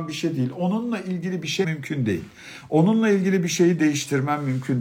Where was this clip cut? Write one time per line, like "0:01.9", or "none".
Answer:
0:01.6